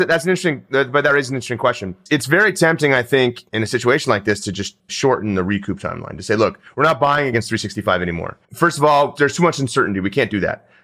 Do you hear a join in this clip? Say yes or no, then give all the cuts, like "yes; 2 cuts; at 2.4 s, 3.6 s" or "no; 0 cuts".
yes; 2 cuts; at 4.8 s, 8.4 s